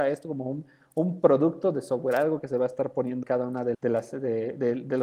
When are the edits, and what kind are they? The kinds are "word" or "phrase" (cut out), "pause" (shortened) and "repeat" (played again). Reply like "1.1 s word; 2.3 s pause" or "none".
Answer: 3.2 s word; 3.7 s word